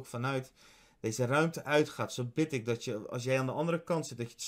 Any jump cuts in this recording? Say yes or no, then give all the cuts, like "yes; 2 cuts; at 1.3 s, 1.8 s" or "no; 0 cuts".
no; 0 cuts